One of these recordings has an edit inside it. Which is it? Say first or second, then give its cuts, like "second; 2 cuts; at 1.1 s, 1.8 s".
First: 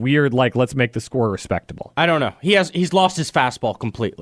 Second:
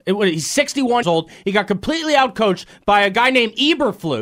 second; 1 cut; at 1.0 s